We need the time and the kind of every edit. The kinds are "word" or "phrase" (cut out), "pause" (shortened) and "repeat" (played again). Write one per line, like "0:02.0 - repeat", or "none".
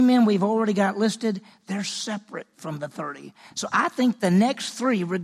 none